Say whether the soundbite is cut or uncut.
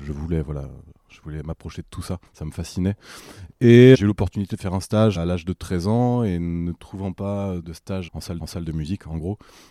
cut